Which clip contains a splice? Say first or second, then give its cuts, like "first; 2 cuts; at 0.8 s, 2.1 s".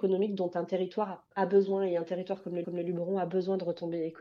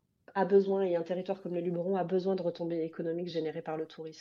first; 2 cuts; at 1.3 s, 2.6 s